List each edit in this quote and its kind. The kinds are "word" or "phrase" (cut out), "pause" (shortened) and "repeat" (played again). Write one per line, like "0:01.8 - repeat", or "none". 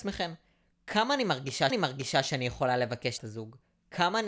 0:01.7 - repeat
0:03.2 - phrase